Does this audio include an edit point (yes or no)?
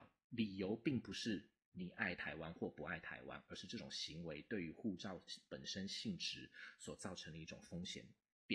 no